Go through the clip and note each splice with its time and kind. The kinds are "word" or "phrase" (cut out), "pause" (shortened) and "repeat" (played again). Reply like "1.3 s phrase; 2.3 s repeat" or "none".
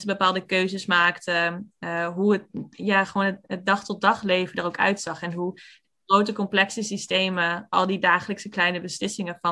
none